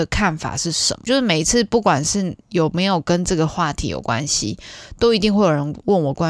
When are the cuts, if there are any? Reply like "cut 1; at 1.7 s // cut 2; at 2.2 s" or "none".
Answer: cut 1; at 2.4 s